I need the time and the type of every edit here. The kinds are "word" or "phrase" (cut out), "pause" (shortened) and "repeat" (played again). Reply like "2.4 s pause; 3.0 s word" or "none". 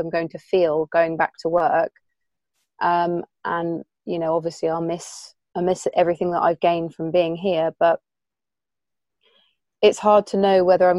none